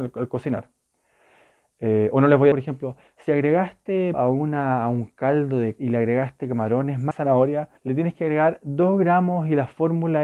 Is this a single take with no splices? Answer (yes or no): no